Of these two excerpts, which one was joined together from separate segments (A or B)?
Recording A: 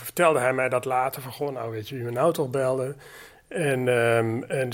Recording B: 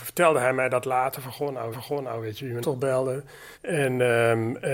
B